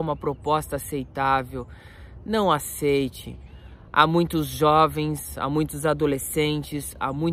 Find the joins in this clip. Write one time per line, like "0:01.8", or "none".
none